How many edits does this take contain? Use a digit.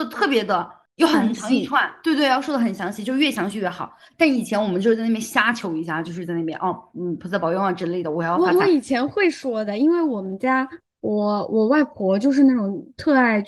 0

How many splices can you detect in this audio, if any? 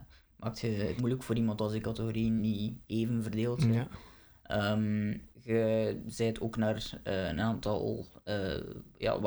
4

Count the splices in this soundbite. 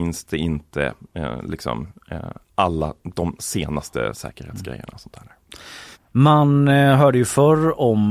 1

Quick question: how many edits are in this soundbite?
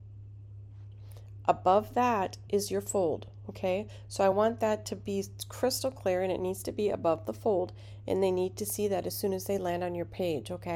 0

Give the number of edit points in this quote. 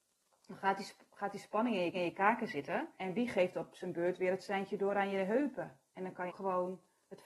4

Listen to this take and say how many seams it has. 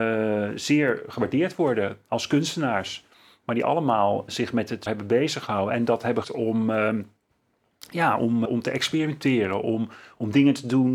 4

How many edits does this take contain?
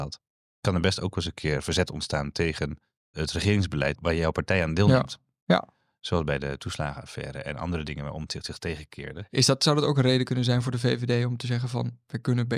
2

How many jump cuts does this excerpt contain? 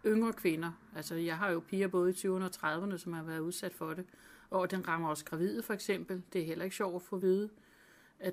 0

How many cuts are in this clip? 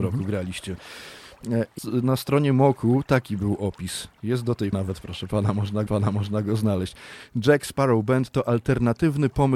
3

